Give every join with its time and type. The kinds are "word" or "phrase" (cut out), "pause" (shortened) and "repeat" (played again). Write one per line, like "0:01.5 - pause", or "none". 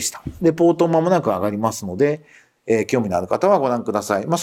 none

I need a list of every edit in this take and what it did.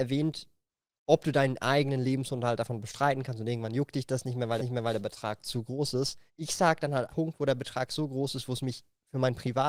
0:04.6 - repeat
0:06.3 - pause
0:07.1 - phrase

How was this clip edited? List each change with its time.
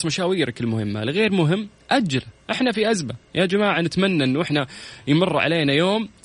none

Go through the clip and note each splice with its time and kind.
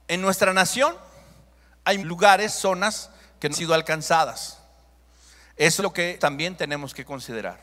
0:02.0 - word
0:03.5 - word
0:05.8 - word
0:06.2 - word

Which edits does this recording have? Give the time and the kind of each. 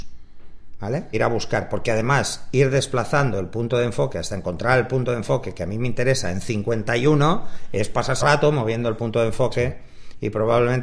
0:01.1 - phrase
0:08.2 - word

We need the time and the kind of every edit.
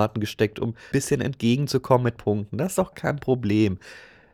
0:00.9 - word
0:02.2 - word
0:02.9 - word

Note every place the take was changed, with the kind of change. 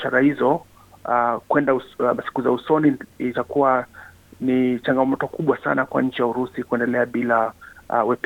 none

